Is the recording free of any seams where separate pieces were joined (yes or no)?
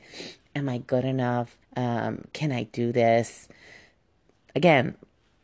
no